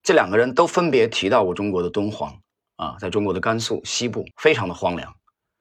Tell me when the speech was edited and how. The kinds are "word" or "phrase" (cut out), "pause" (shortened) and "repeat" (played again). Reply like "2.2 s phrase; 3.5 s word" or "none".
2.5 s pause; 4.3 s pause